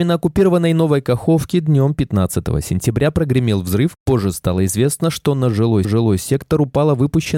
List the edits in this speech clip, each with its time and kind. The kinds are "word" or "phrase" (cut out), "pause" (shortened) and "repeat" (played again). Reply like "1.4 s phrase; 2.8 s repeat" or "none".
5.8 s repeat